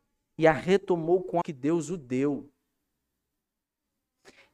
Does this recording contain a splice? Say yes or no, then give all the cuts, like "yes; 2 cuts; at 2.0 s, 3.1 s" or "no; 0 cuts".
yes; 1 cut; at 1.4 s